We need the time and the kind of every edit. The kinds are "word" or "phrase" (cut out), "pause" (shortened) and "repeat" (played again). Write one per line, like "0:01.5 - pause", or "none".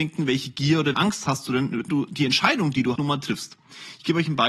0:00.9 - word
0:01.9 - word
0:03.0 - word